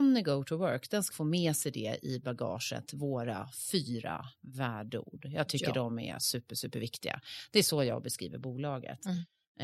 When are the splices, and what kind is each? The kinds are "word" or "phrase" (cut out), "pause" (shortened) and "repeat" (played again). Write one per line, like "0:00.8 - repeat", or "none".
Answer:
0:01.1 - word